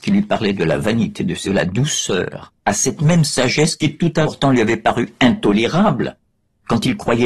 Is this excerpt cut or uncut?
cut